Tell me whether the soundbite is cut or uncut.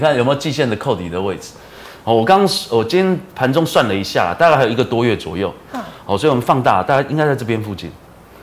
uncut